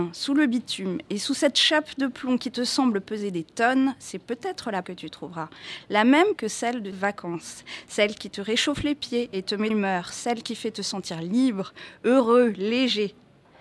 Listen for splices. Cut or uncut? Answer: cut